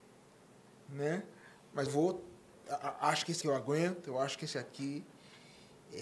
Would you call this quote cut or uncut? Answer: cut